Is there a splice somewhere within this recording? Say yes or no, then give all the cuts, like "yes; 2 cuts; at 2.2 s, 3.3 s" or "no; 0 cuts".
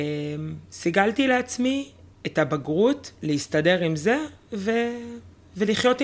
no; 0 cuts